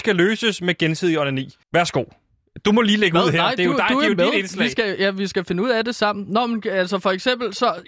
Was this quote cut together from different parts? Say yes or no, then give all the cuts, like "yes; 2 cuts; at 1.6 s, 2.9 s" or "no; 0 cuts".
yes; 1 cut; at 1.6 s